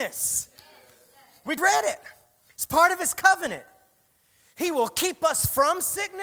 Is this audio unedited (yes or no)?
no